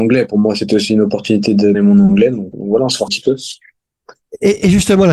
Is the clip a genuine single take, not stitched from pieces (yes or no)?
no